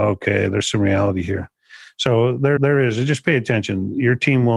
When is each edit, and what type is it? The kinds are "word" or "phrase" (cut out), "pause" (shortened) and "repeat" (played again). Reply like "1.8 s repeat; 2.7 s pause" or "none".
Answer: 2.6 s repeat

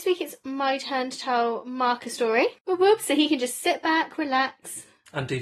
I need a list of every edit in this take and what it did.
2.6 s pause

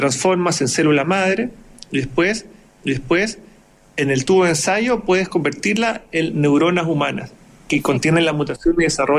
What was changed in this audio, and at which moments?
2.8 s repeat

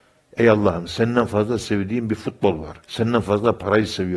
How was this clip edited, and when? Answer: 2.8 s pause

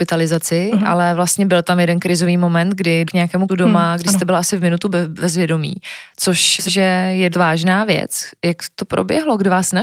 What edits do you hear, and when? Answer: 3.1 s word; 3.5 s word; 6.7 s word; 7.3 s word

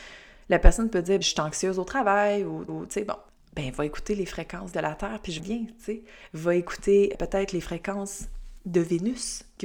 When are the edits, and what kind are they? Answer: 1.2 s word; 2.7 s repeat; 3.3 s pause; 4.7 s word; 5.4 s phrase; 7.1 s word

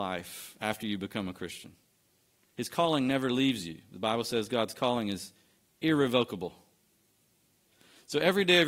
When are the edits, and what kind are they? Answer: none

